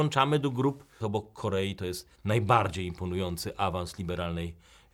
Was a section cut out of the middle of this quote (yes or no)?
yes